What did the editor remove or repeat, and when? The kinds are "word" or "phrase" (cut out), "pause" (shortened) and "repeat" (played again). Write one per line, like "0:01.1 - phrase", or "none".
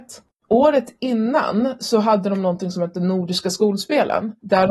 none